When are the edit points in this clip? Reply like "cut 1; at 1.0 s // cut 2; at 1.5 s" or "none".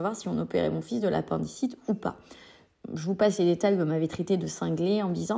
none